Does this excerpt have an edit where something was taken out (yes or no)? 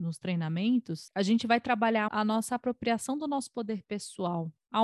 yes